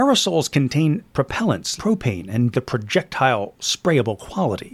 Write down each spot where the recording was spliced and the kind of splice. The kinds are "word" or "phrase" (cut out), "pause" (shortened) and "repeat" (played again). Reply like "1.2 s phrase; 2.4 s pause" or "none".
1.8 s word; 2.5 s phrase